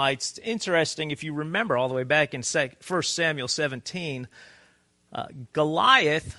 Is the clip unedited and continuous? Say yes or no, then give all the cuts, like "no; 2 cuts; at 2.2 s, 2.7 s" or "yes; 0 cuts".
yes; 0 cuts